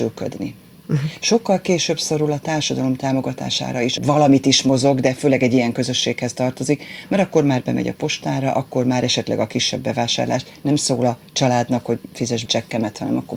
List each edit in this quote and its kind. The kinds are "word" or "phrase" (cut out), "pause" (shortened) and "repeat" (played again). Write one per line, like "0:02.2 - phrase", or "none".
0:04.0 - word
0:12.5 - phrase